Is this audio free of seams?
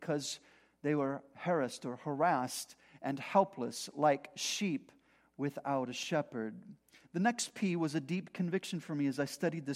yes; 0 cuts

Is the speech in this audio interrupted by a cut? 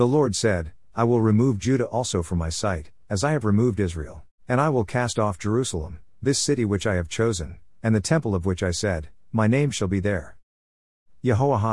yes; 1 cut; at 4.4 s

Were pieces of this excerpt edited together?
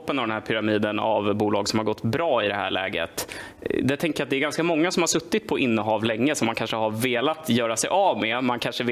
no; 0 cuts

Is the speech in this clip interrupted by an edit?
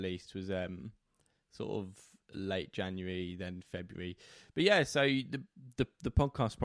no; 0 cuts

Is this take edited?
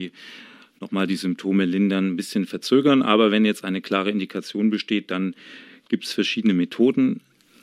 no; 0 cuts

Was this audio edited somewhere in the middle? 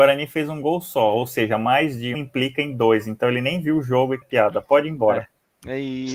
yes; 2 cuts; at 2.1 s, 4.2 s

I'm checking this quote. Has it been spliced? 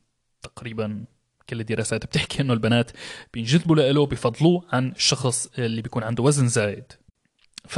no; 0 cuts

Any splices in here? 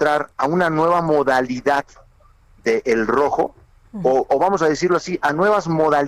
no; 0 cuts

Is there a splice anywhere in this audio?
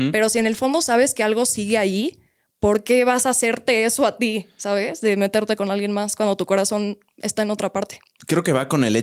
no; 0 cuts

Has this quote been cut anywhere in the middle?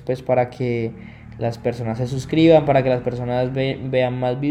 no; 0 cuts

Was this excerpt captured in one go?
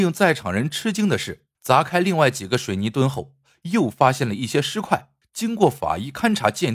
no; 2 cuts; at 1.5 s, 5.2 s

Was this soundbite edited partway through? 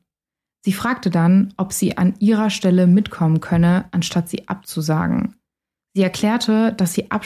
no; 0 cuts

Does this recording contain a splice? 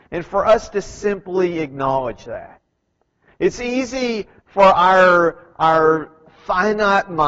no; 0 cuts

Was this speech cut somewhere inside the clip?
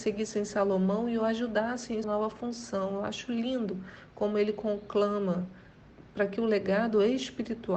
yes; 1 cut; at 2.0 s

